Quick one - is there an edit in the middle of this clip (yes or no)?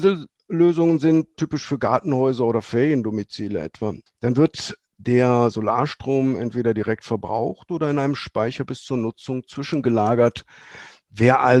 yes